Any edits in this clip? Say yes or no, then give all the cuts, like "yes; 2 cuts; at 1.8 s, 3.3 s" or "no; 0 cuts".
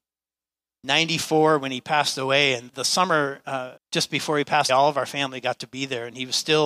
yes; 3 cuts; at 2.7 s, 3.8 s, 4.7 s